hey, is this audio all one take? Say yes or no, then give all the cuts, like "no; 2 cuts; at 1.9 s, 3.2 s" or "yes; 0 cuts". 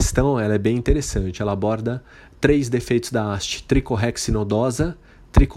yes; 0 cuts